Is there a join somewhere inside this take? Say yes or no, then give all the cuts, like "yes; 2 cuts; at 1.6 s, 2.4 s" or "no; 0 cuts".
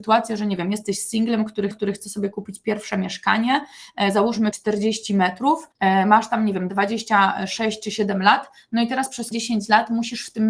yes; 4 cuts; at 1.7 s, 4.5 s, 5.7 s, 9.3 s